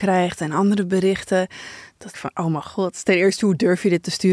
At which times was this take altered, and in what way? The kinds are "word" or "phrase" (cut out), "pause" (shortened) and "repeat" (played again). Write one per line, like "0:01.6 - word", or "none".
0:02.1 - phrase